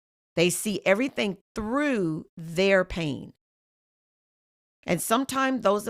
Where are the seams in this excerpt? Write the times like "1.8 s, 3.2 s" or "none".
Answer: none